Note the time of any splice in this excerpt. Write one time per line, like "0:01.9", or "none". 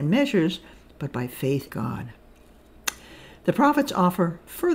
0:01.7